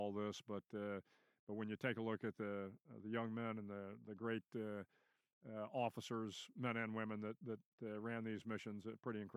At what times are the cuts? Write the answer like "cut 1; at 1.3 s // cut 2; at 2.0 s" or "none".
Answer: none